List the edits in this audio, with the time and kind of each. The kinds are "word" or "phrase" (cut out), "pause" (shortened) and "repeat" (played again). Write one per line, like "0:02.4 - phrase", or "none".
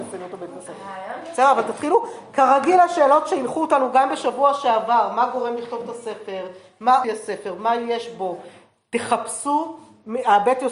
0:07.0 - word